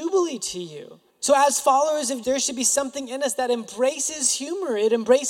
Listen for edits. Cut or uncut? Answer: cut